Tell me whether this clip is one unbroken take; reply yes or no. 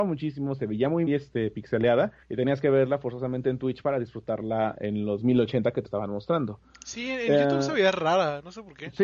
no